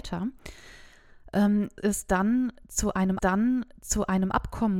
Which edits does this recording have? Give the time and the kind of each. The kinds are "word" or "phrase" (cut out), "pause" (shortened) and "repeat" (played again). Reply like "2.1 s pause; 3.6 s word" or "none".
1.8 s word; 3.2 s repeat